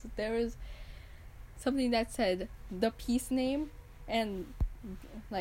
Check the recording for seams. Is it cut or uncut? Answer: uncut